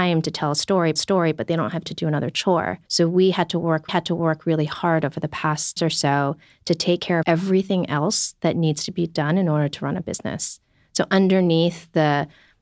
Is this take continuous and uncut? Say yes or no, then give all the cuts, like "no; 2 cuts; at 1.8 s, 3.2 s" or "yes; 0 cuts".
no; 6 cuts; at 1.0 s, 1.9 s, 2.9 s, 3.9 s, 5.8 s, 7.2 s